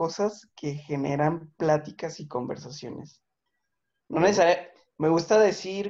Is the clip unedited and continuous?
yes; 0 cuts

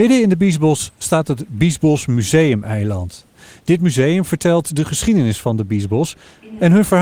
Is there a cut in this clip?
no; 0 cuts

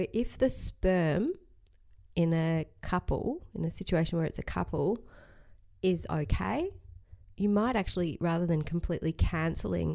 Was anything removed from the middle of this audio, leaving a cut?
no; 0 cuts

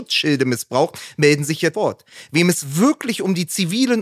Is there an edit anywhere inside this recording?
yes; 1 cut; at 1.7 s

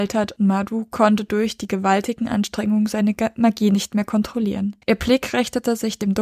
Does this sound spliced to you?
yes; 1 cut; at 4.8 s

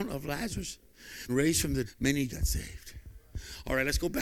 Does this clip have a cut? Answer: yes; 3 cuts; at 1.3 s, 1.9 s, 2.3 s

